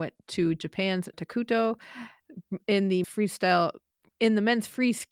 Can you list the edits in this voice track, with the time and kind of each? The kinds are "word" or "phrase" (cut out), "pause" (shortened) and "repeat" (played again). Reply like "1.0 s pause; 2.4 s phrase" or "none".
1.1 s word; 3.0 s word